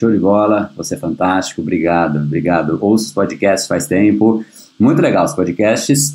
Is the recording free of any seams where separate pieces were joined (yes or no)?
yes